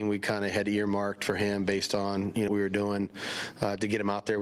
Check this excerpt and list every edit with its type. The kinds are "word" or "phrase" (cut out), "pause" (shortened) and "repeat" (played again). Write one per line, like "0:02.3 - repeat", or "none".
0:02.5 - word